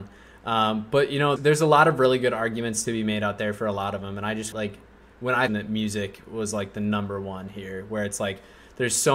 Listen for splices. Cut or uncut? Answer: cut